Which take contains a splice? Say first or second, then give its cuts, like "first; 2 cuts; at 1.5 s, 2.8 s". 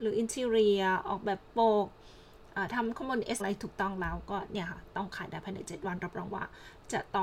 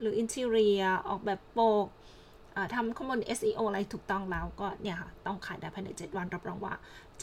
first; 1 cut; at 3.4 s